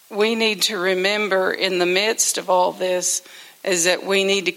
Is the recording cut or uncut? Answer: uncut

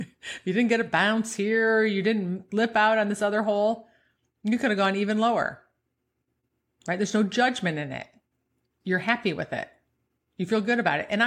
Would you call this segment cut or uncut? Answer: uncut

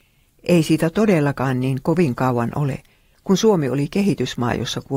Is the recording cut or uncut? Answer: uncut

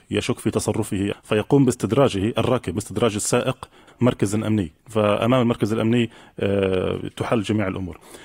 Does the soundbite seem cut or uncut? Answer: cut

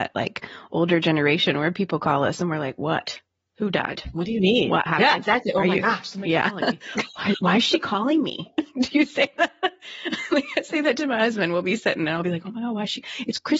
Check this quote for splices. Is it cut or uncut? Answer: uncut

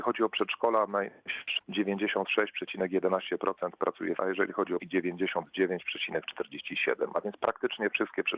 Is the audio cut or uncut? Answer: cut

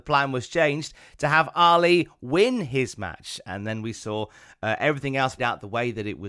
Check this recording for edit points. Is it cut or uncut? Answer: cut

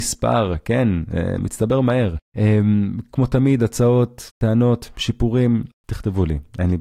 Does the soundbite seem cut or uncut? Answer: uncut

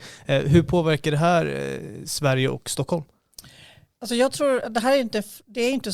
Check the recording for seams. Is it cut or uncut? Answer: uncut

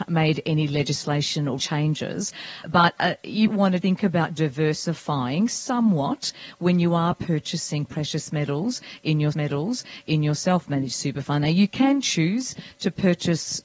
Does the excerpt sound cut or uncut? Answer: cut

